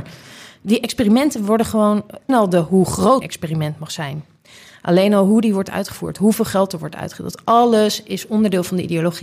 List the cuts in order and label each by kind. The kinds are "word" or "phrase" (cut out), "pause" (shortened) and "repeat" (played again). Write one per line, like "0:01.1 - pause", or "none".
0:02.3 - word
0:03.2 - word